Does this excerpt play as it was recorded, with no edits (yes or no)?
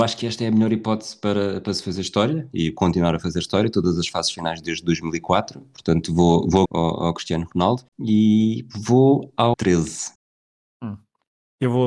no